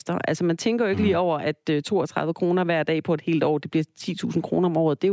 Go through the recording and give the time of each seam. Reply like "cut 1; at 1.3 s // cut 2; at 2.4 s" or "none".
none